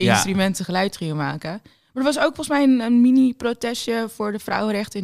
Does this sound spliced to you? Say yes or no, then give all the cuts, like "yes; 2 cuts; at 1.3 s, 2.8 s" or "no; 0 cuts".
no; 0 cuts